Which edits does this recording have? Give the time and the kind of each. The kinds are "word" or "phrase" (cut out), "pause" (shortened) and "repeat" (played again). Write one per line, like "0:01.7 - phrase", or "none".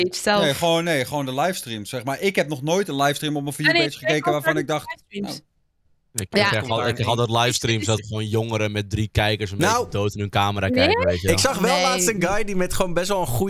0:08.0 - word